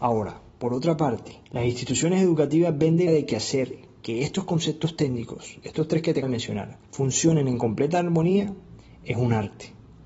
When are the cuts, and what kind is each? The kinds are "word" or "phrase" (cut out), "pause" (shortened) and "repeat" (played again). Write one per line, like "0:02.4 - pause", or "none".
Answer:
0:01.5 - pause
0:03.1 - phrase
0:06.2 - word
0:06.9 - pause